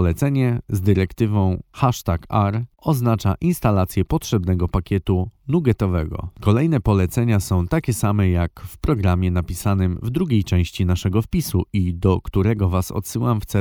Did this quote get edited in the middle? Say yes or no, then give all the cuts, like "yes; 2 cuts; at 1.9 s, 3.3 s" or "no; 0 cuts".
no; 0 cuts